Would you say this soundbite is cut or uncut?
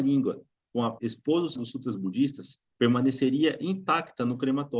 cut